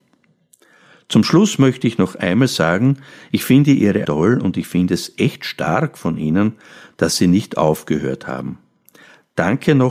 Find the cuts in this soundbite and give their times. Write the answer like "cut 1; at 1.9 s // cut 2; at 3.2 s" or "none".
cut 1; at 4.0 s